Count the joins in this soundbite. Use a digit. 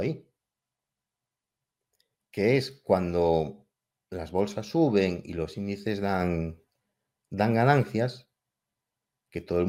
0